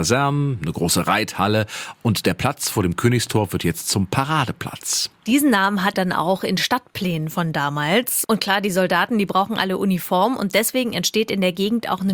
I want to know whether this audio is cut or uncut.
cut